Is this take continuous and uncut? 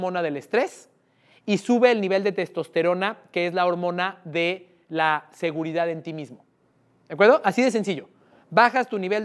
yes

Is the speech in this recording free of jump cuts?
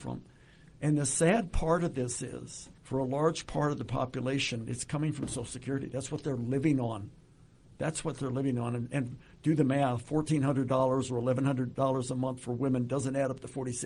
no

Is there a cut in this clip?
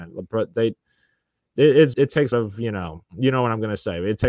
yes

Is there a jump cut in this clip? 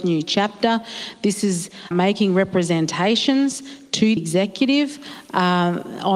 yes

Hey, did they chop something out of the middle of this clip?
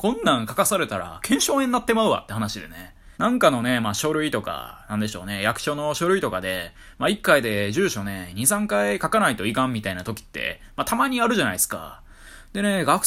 yes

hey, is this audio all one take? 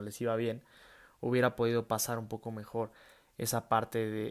yes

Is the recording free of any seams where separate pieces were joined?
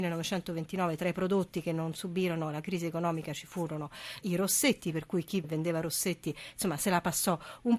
no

